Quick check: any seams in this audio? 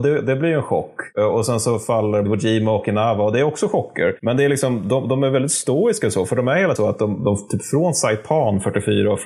yes; 2 cuts; at 2.3 s, 6.8 s

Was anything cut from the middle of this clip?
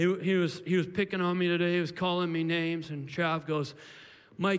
no; 0 cuts

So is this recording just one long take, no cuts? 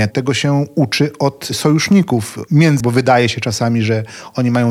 no; 1 cut; at 2.8 s

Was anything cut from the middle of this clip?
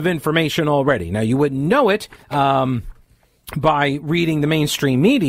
yes; 1 cut; at 2.2 s

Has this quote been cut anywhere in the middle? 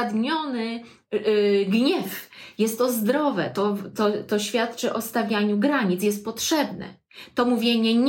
no; 0 cuts

